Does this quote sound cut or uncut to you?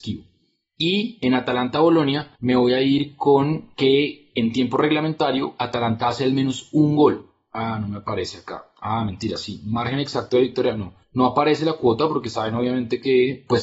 cut